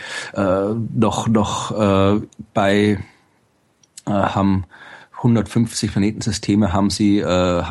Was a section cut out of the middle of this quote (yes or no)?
no